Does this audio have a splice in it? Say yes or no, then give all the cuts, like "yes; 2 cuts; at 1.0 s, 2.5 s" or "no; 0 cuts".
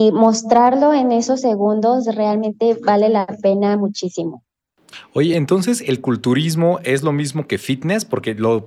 no; 0 cuts